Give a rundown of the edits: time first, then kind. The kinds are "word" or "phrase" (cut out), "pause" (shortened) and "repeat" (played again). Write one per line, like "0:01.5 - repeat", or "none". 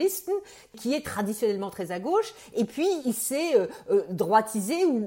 none